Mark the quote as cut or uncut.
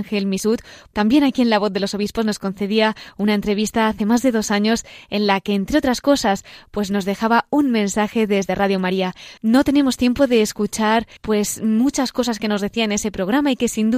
cut